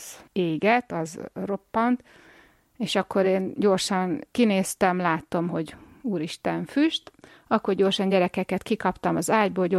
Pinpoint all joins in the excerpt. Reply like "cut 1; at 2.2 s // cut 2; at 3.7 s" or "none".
none